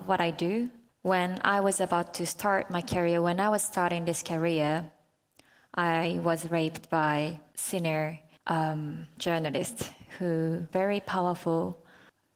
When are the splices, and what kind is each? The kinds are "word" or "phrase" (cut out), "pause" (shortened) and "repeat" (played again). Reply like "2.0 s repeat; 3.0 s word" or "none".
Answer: 10.7 s word